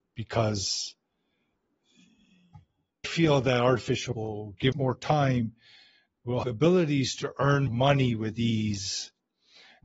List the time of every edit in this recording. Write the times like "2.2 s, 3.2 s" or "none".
3.0 s, 4.1 s, 4.7 s, 6.4 s, 7.7 s